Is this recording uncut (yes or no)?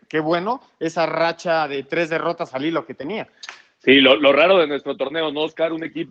yes